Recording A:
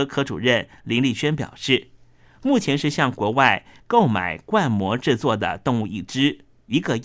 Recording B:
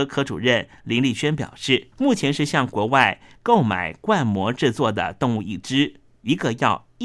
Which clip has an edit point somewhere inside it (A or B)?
B